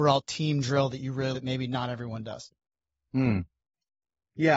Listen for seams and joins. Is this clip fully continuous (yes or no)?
no